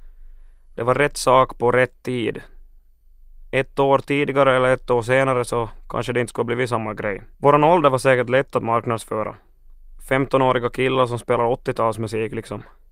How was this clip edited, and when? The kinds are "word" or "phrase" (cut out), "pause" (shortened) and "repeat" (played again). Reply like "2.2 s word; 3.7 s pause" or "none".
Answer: 7.3 s pause